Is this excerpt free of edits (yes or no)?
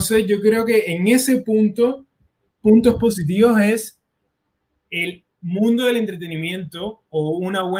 yes